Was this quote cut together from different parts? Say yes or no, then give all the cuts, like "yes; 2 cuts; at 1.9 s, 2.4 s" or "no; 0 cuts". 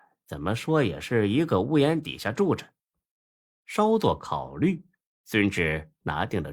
no; 0 cuts